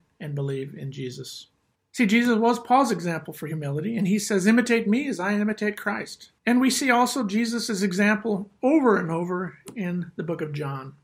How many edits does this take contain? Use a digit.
2